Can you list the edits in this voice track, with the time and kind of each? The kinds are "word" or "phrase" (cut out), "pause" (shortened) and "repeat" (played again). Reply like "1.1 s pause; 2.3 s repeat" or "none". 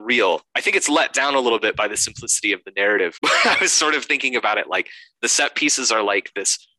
none